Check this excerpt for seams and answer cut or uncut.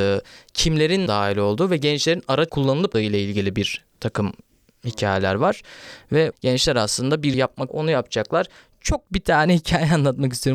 cut